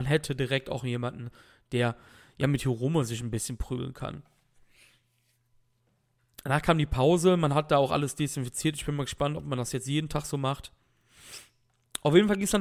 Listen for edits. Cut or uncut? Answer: uncut